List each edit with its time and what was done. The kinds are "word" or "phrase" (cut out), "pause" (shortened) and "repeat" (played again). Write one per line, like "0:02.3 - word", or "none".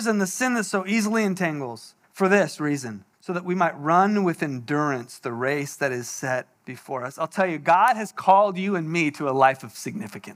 0:02.0 - pause
0:03.1 - pause
0:06.6 - pause

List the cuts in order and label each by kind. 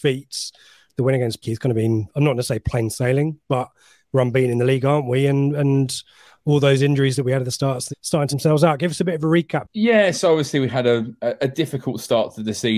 0:01.4 - word
0:07.9 - phrase
0:08.3 - word

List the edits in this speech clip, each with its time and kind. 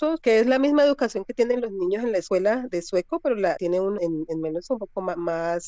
0:03.6 - word
0:04.0 - word
0:04.7 - word

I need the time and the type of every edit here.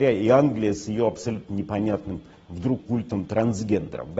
0:02.8 - word

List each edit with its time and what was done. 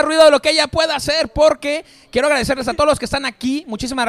none

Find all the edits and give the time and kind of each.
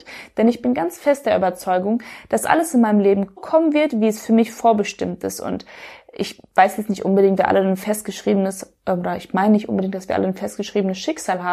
0:03.4 - word
0:07.4 - word

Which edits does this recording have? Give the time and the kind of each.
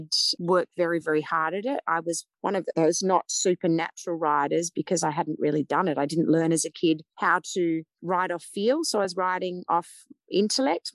none

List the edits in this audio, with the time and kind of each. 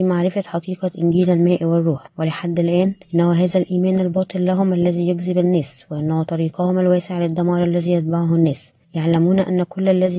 0:02.1 - pause
0:03.0 - pause
0:08.8 - pause

